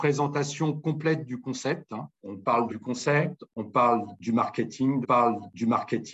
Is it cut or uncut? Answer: cut